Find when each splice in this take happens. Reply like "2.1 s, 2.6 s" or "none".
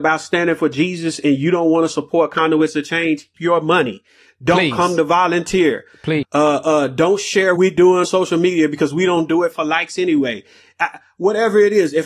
3.3 s, 6.2 s, 7.6 s, 8.0 s